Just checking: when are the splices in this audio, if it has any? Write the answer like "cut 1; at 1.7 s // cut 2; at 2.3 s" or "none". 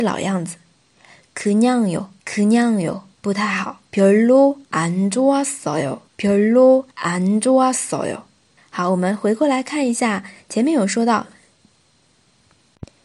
cut 1; at 2.2 s // cut 2; at 3.1 s // cut 3; at 3.9 s // cut 4; at 4.6 s // cut 5; at 6.1 s // cut 6; at 6.9 s // cut 7; at 8.6 s